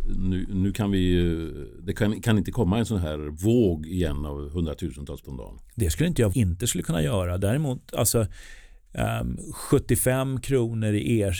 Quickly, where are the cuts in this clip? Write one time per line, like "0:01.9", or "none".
0:05.2
0:06.3